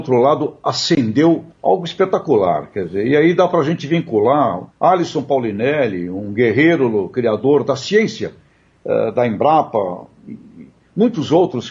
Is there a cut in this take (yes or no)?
yes